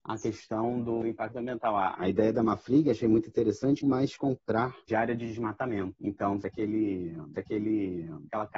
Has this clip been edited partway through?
yes; 3 cuts; at 3.8 s, 4.9 s, 7.3 s

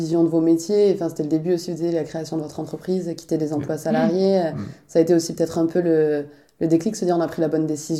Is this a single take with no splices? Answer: yes; 0 cuts

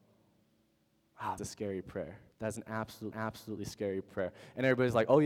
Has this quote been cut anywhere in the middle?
yes; 3 cuts; at 1.4 s, 2.3 s, 3.1 s

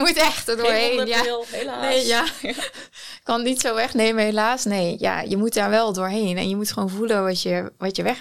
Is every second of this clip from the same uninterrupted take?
yes; 0 cuts

